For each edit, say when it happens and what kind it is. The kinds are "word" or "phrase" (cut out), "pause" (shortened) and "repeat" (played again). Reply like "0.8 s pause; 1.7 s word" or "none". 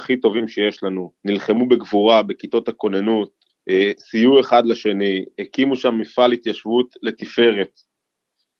1.2 s pause; 3.5 s pause